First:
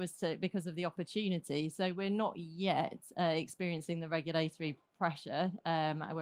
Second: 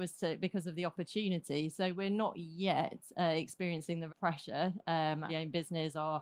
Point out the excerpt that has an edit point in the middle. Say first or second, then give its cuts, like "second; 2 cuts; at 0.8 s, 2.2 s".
second; 2 cuts; at 4.1 s, 5.3 s